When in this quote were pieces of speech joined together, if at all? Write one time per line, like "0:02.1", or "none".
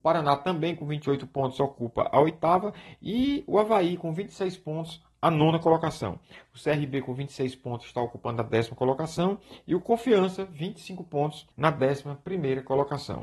0:11.5